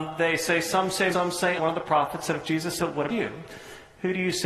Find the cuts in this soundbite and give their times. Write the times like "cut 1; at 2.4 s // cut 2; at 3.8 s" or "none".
cut 1; at 1.1 s // cut 2; at 1.6 s // cut 3; at 2.4 s // cut 4; at 2.8 s // cut 5; at 3.1 s